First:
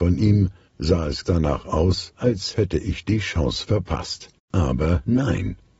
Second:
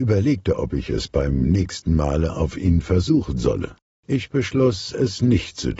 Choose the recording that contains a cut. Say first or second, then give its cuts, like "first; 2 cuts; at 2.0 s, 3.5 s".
first; 2 cuts; at 1.2 s, 4.4 s